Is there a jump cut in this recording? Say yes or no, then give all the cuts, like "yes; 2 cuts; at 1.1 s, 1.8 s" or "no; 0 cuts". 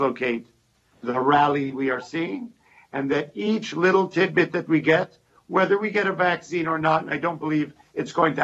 no; 0 cuts